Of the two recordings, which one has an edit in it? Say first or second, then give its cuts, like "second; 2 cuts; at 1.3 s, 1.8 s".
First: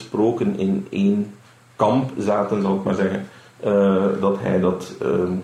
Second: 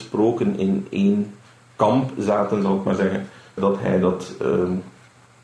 second; 1 cut; at 3.6 s